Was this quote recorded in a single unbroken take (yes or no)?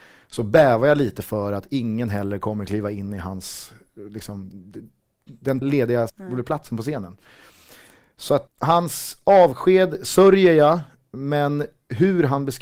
no